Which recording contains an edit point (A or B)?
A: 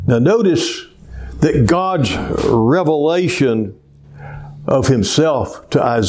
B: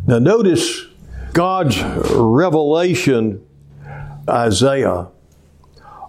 B